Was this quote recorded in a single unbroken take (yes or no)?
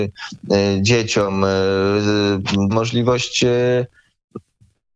no